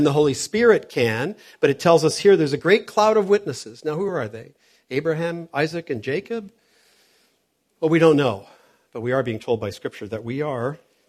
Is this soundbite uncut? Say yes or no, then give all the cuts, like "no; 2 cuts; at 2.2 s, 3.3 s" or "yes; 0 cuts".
yes; 0 cuts